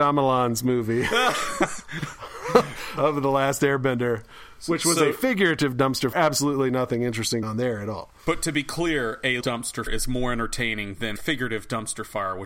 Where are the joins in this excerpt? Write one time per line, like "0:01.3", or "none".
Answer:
0:03.0
0:06.1
0:07.4
0:09.4
0:09.9
0:11.2